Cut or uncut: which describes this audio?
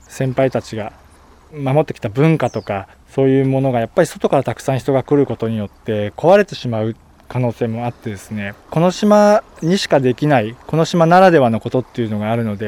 cut